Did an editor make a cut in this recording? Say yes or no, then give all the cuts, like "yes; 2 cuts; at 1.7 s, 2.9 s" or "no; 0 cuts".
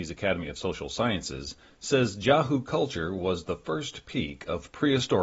no; 0 cuts